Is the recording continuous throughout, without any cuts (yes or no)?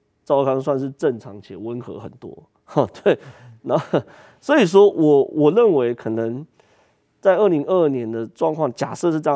yes